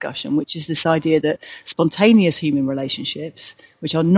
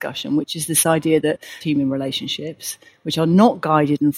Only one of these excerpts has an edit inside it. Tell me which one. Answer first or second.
second